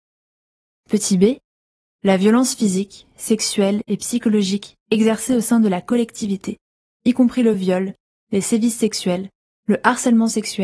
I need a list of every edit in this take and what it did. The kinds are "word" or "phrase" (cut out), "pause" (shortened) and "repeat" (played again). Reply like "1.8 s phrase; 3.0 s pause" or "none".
none